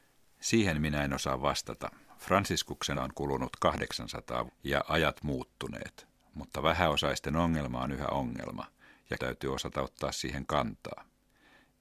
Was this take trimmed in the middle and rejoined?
yes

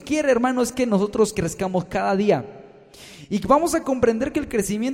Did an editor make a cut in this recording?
no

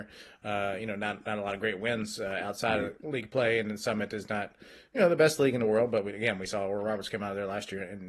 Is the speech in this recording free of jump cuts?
yes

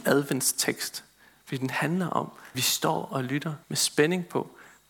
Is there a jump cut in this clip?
yes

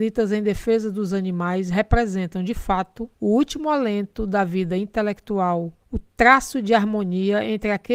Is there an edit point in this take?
yes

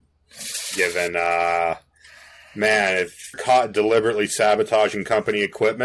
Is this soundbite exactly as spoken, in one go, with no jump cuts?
no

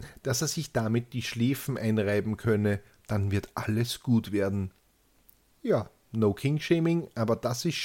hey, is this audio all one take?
yes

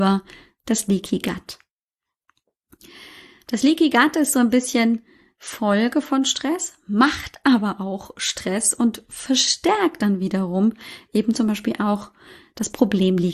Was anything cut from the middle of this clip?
no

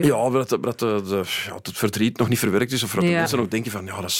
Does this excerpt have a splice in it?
no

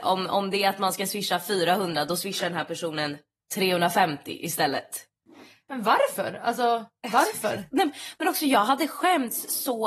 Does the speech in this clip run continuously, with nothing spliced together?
yes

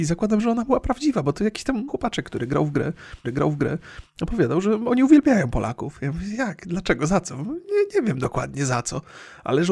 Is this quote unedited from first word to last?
no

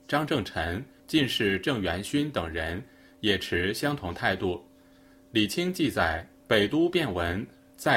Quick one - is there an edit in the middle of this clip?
no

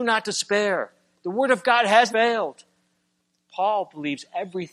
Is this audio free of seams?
no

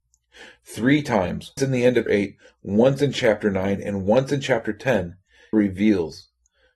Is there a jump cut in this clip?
yes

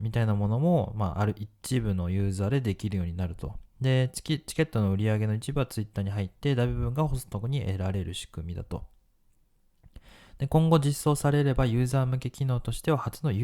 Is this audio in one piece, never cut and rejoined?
yes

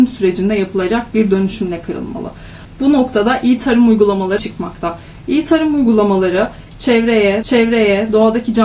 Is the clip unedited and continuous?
no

